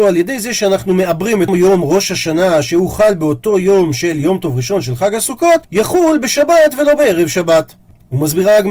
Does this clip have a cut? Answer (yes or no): yes